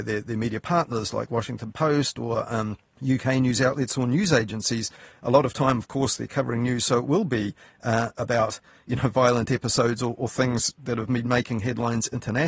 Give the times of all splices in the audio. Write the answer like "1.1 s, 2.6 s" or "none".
none

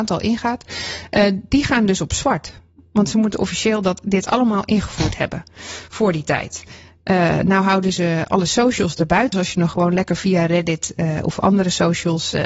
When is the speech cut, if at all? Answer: 9.3 s

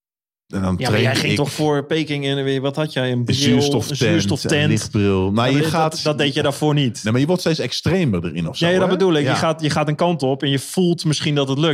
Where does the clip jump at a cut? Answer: none

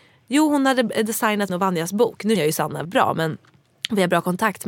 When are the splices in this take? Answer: 1.5 s, 2.4 s, 2.8 s

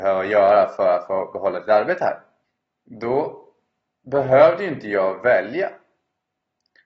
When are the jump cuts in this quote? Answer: 2.4 s

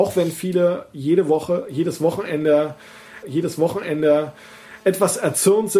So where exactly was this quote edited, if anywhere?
3.2 s

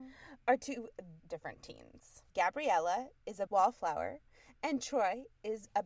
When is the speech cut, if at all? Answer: 1.2 s, 2.3 s, 3.5 s

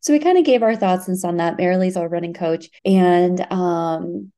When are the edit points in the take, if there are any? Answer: 1.2 s, 1.9 s, 2.8 s

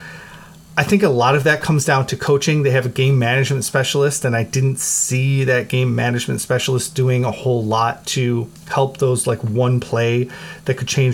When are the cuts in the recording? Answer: 8.6 s

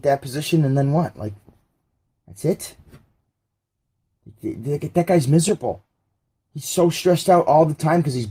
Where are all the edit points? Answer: none

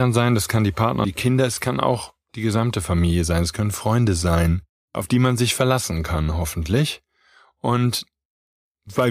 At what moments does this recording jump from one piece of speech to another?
1.0 s, 4.7 s

